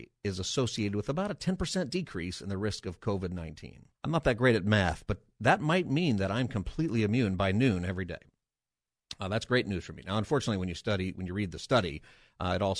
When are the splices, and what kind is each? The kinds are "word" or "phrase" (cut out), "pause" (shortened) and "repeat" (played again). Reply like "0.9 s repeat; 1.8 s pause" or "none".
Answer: 3.9 s pause

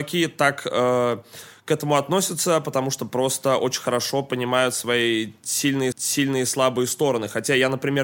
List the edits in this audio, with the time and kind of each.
5.9 s repeat

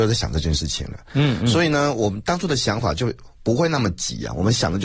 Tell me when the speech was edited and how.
3.4 s pause

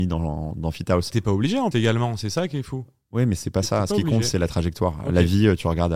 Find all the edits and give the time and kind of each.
1.1 s word; 1.7 s word

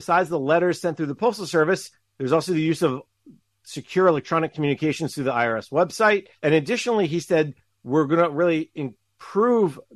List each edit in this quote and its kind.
6.4 s pause

